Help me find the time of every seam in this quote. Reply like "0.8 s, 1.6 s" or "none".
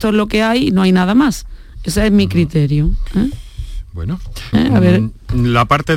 4.5 s